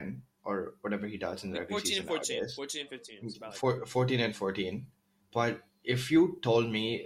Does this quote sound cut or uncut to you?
cut